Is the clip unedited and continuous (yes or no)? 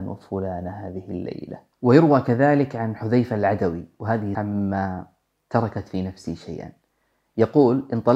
no